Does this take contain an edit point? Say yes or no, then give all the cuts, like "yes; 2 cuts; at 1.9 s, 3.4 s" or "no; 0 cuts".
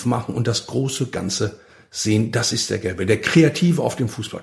no; 0 cuts